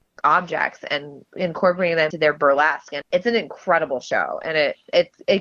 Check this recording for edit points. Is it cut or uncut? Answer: cut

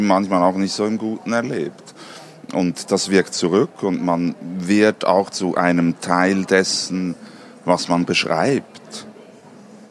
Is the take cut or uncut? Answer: uncut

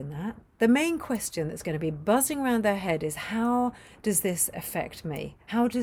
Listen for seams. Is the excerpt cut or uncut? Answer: uncut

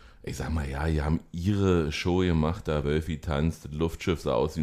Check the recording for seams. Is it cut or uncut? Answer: uncut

